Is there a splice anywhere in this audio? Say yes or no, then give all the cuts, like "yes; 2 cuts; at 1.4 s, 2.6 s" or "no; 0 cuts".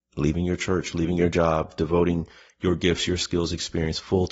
no; 0 cuts